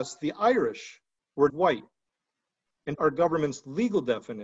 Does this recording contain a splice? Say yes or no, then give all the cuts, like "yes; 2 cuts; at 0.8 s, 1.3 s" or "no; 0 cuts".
yes; 2 cuts; at 1.5 s, 2.9 s